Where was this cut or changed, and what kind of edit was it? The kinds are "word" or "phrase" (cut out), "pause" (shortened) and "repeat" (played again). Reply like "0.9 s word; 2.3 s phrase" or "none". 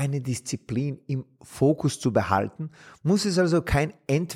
none